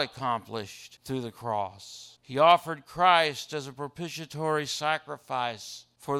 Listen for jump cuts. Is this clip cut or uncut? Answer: uncut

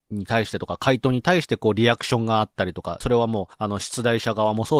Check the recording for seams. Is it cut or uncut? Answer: cut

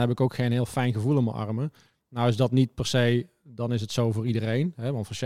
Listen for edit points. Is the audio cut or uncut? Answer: uncut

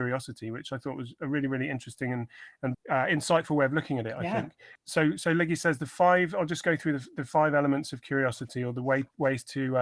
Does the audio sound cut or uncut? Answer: cut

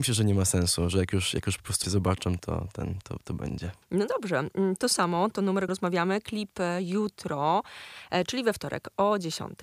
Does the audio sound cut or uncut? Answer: cut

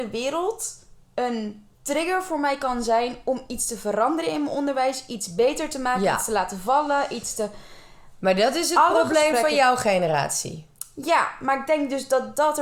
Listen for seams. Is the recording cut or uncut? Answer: cut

